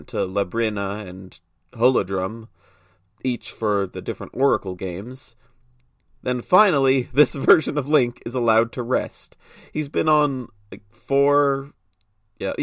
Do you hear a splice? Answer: no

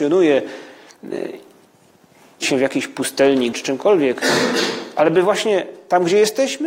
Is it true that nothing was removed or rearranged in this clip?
no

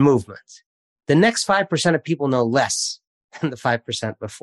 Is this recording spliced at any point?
no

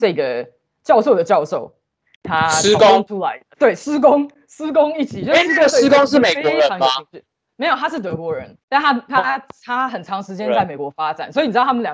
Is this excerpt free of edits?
no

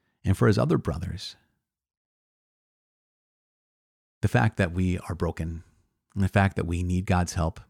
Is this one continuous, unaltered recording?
yes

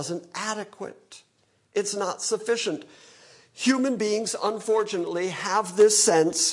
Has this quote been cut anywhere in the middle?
no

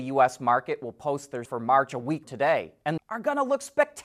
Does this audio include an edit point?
yes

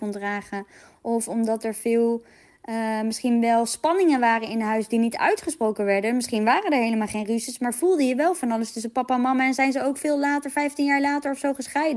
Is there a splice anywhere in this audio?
no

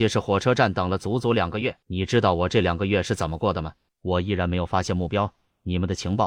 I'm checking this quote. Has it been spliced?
yes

